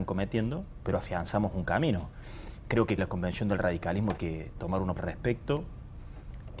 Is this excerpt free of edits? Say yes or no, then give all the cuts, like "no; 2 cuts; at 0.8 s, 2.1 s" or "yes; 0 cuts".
no; 3 cuts; at 3.0 s, 4.2 s, 5.0 s